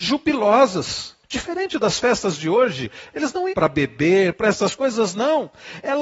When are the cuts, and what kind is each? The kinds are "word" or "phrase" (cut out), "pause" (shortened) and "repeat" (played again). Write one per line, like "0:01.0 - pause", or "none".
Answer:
0:01.2 - pause
0:03.5 - phrase